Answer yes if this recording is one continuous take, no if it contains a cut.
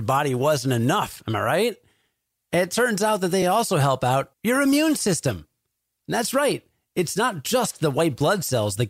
yes